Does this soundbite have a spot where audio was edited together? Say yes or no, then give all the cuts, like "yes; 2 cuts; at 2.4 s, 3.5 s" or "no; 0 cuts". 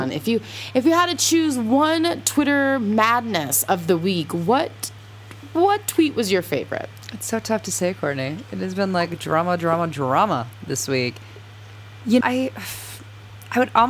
yes; 1 cut; at 12.2 s